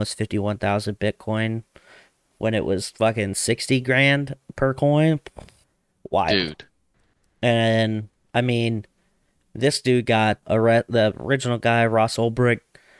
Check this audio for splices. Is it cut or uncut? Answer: cut